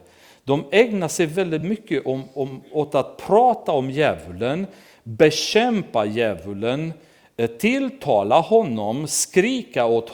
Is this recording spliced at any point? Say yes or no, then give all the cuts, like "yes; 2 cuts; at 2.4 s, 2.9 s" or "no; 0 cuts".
no; 0 cuts